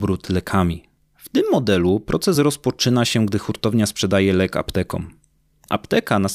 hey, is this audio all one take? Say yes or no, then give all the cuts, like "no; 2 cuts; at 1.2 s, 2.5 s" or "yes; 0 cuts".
yes; 0 cuts